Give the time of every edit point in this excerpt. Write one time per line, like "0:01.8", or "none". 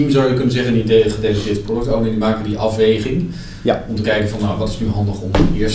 none